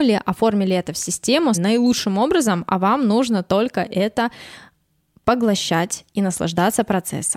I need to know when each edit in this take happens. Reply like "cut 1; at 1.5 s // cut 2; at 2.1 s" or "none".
cut 1; at 1.5 s